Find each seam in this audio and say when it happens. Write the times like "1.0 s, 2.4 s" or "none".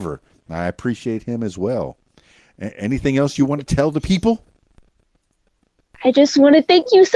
none